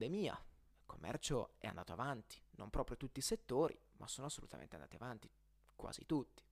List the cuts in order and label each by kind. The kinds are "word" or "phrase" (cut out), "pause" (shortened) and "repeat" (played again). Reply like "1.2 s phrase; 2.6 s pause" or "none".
none